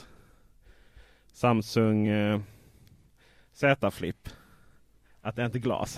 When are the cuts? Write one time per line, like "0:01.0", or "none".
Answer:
none